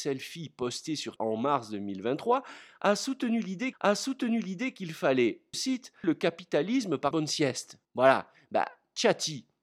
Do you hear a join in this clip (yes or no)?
yes